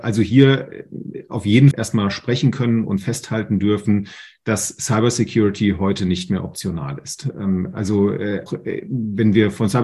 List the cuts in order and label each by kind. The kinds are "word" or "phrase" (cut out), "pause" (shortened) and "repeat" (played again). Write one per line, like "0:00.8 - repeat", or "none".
0:01.7 - phrase
0:08.5 - word